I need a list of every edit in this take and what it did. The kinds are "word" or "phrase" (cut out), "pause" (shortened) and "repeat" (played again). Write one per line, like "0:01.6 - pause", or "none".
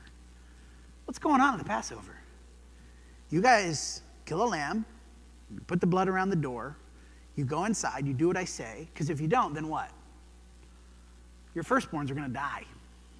none

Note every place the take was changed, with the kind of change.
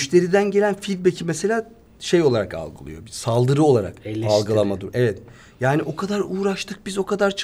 none

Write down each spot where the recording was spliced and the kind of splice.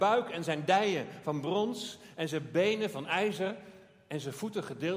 none

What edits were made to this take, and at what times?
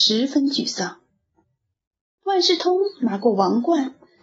none

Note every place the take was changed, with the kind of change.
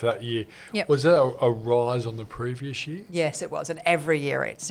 none

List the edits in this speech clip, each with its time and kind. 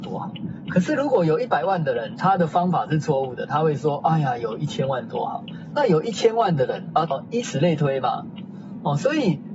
0:07.1 - phrase

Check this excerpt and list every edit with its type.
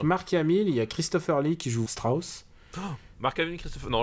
0:01.9 - word

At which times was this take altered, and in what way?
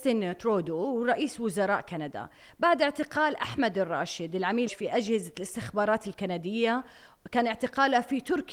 0:04.7 - word

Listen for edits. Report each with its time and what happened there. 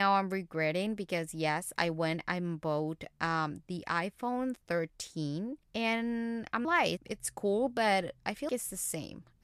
0:05.6 - pause
0:06.6 - phrase
0:07.0 - word
0:08.5 - word

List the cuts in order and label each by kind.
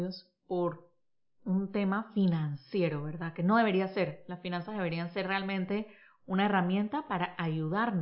none

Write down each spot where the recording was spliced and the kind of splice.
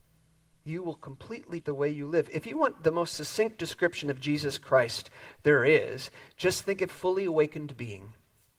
0:01.6 - word
0:06.9 - phrase

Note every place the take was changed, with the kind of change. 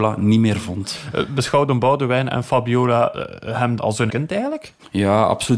0:03.8 - word
0:04.1 - word

